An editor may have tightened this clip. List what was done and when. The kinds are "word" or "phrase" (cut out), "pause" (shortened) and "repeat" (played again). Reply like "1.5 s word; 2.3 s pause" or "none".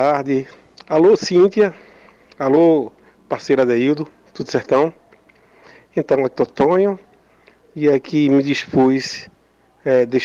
6.3 s word